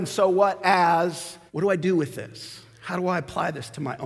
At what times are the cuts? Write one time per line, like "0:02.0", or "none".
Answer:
0:01.5